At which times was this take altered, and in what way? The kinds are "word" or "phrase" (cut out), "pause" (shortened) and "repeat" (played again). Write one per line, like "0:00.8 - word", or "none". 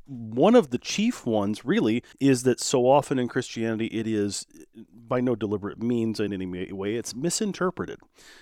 0:02.1 - pause
0:06.3 - word